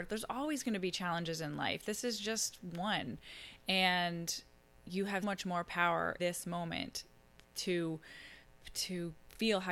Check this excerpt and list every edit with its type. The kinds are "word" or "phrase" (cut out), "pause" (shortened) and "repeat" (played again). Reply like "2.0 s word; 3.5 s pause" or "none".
5.2 s word; 6.2 s word; 8.4 s pause